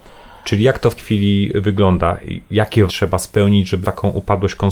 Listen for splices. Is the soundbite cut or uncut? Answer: cut